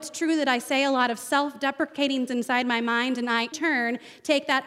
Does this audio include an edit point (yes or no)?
yes